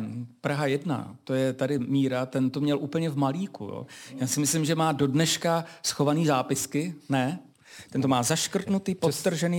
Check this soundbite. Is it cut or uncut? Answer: uncut